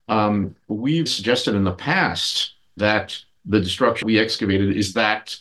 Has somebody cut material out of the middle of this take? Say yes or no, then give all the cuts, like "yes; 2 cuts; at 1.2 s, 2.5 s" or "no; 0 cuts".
yes; 3 cuts; at 1.1 s, 2.8 s, 4.0 s